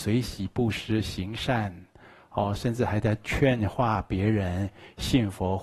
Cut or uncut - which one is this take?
uncut